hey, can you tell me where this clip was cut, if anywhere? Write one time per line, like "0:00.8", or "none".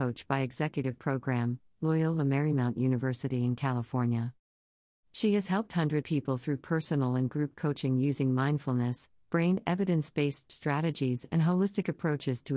0:06.0